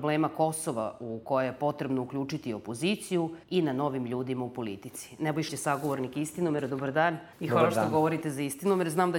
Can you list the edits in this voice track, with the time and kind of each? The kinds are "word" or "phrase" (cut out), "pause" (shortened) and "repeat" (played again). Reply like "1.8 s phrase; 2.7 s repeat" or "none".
3.4 s pause; 5.5 s word; 7.3 s pause